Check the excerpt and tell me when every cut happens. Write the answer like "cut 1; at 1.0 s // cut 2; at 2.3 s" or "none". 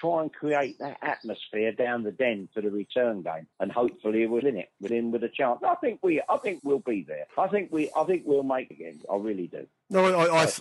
cut 1; at 3.5 s // cut 2; at 4.4 s // cut 3; at 4.9 s // cut 4; at 6.6 s // cut 5; at 7.3 s // cut 6; at 8.7 s